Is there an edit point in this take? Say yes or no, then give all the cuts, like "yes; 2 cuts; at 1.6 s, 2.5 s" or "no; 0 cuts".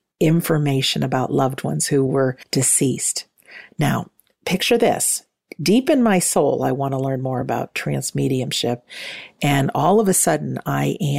no; 0 cuts